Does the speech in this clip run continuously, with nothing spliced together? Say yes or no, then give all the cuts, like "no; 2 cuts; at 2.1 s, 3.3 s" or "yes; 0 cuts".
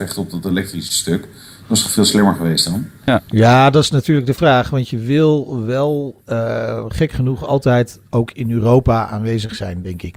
yes; 0 cuts